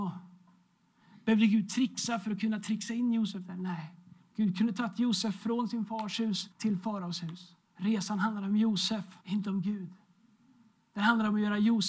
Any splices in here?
yes; 3 cuts; at 6.5 s, 7.6 s, 9.2 s

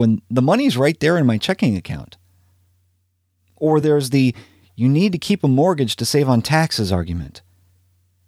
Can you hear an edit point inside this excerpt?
no; 0 cuts

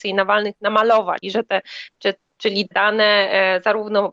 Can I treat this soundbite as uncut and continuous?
no; 2 cuts; at 1.2 s, 2.7 s

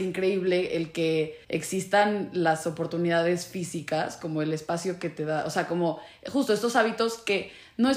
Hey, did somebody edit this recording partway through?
yes; 1 cut; at 1.4 s

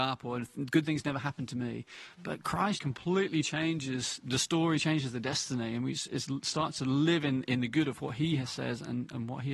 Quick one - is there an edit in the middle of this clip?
yes; 1 cut; at 2.8 s

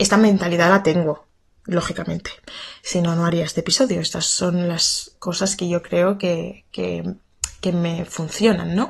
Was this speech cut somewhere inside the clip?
no; 0 cuts

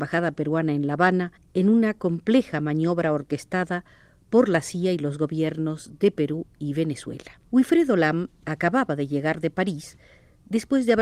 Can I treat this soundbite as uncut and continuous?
no; 2 cuts; at 1.4 s, 7.4 s

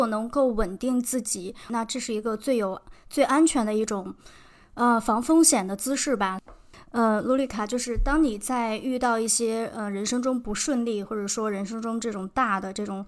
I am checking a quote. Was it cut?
no; 0 cuts

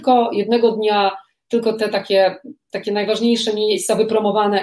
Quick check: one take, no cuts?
yes; 0 cuts

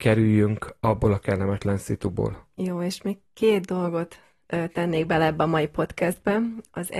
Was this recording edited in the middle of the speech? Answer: no; 0 cuts

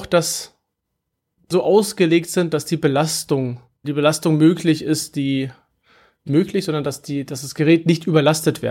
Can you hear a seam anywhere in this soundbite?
yes; 3 cuts; at 1.5 s, 3.8 s, 6.3 s

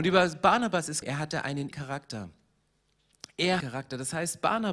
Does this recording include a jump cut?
yes; 3 cuts; at 1.0 s, 1.7 s, 3.6 s

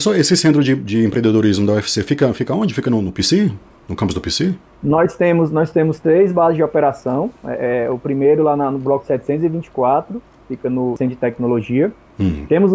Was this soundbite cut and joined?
no; 0 cuts

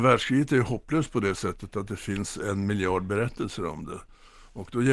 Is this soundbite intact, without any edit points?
yes; 0 cuts

